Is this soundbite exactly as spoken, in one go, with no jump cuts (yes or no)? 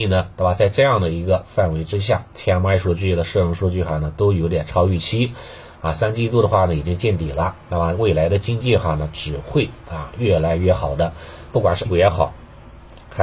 no